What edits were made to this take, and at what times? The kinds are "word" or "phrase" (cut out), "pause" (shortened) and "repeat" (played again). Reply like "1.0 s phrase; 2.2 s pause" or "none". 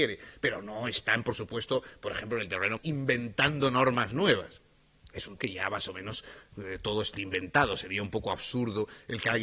2.8 s word; 5.4 s word; 7.1 s word